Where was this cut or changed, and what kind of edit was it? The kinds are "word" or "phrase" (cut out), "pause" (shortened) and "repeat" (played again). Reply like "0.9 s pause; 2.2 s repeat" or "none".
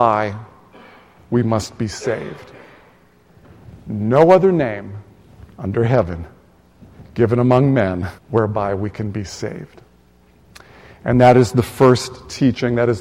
8.2 s pause